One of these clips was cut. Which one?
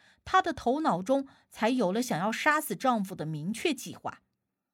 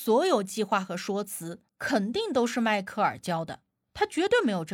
second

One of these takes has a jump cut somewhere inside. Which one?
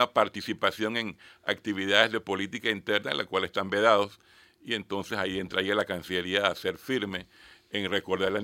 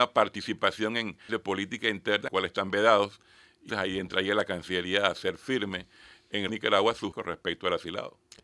second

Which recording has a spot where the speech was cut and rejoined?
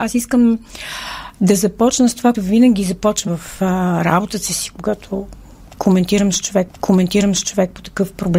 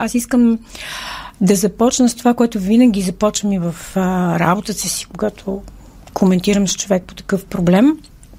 first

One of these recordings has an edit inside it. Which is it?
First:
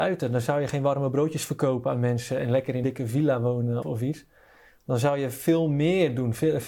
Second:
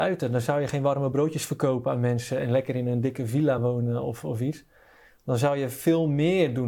first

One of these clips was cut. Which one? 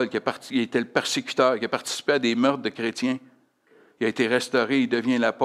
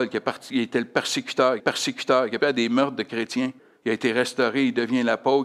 second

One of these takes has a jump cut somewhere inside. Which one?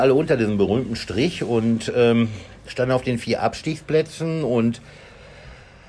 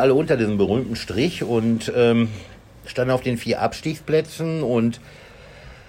first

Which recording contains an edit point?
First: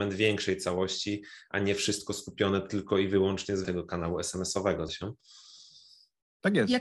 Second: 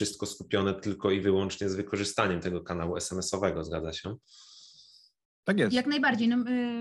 first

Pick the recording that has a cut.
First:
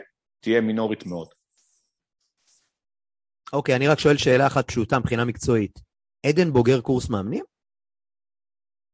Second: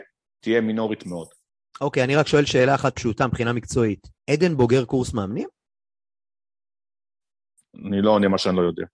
second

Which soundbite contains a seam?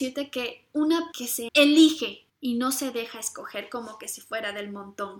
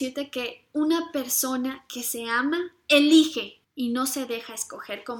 first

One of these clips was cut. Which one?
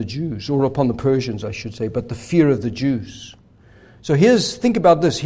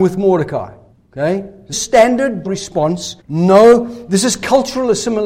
second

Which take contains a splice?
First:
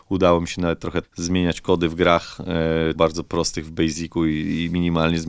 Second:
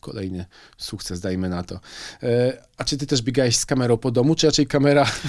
first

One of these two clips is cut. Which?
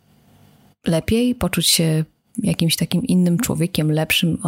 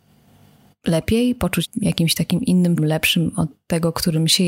second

